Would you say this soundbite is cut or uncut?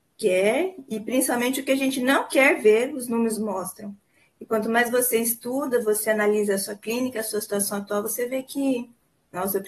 uncut